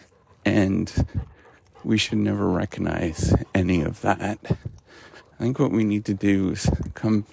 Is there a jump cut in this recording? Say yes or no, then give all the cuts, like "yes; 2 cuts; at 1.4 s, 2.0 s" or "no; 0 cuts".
no; 0 cuts